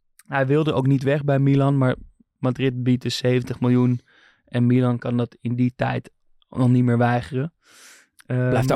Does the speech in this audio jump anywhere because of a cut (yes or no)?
no